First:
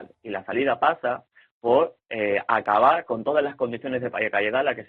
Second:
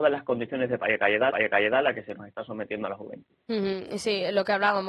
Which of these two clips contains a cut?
second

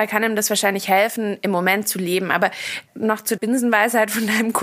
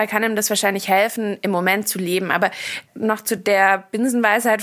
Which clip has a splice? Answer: first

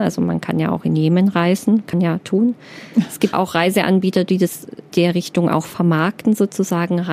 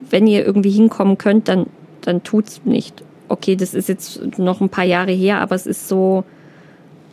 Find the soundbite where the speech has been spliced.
first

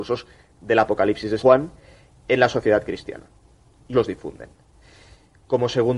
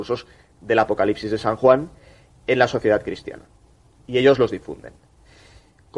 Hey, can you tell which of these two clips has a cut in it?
first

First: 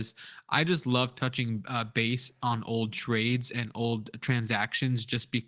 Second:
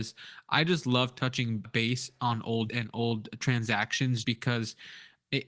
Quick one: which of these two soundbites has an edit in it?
second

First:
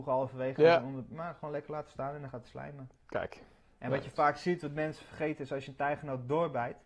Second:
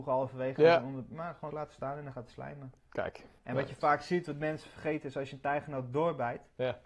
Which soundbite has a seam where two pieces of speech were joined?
second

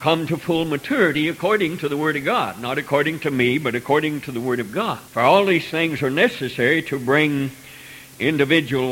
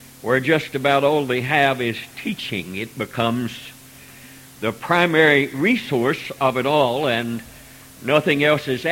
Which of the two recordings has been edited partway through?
first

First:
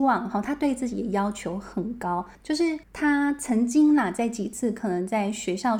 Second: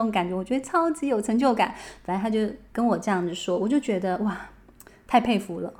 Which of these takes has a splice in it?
first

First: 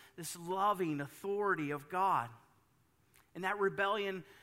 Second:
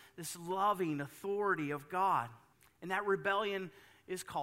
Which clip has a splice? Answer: second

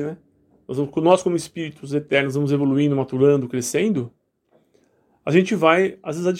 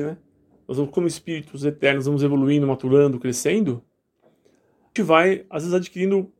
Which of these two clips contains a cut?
second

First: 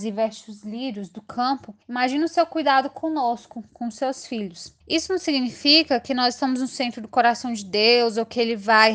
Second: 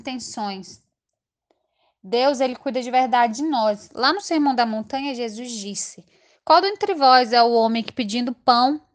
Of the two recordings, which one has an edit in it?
first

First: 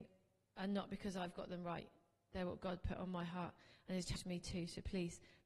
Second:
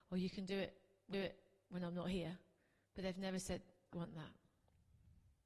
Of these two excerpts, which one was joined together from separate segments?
second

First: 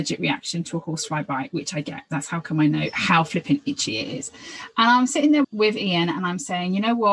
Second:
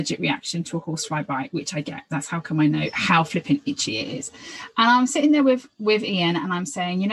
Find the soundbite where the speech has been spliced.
first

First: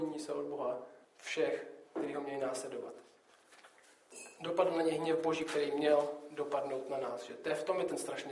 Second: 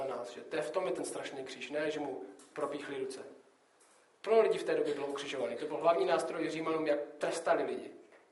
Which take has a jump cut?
first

